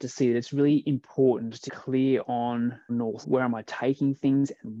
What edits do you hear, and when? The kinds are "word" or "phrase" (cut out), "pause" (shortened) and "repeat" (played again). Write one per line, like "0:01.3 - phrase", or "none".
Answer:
0:01.7 - word
0:02.9 - word
0:03.2 - word